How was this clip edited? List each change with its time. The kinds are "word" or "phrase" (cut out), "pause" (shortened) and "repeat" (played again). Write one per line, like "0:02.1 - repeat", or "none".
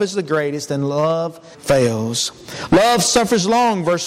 0:01.5 - word

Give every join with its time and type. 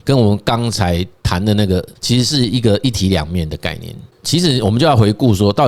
0:01.9 - pause

